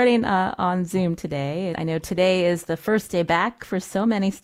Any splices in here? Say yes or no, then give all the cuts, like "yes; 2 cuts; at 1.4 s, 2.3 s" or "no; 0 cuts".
yes; 1 cut; at 1.7 s